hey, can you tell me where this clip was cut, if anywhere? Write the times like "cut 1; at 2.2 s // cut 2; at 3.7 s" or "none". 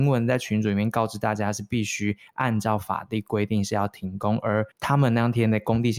cut 1; at 4.7 s